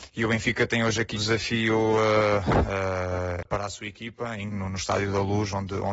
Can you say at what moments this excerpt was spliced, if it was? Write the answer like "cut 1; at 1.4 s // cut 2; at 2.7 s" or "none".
cut 1; at 1.2 s // cut 2; at 3.4 s // cut 3; at 4.5 s